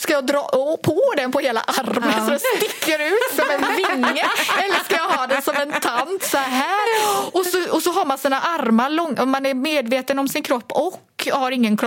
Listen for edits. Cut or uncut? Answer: uncut